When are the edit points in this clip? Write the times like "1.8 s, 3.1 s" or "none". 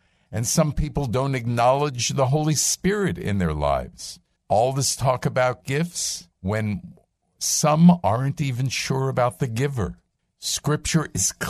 4.4 s, 6.3 s, 10.2 s